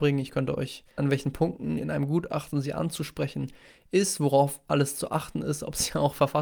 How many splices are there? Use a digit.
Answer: 1